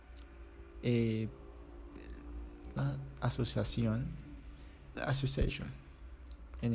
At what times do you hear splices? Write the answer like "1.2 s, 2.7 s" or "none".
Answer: 2.8 s, 4.9 s